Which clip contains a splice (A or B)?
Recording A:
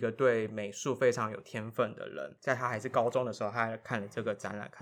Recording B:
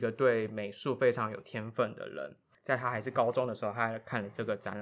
A